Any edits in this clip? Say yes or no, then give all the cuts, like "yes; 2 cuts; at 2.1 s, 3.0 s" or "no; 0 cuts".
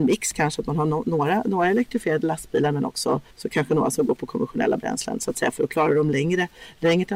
yes; 1 cut; at 3.3 s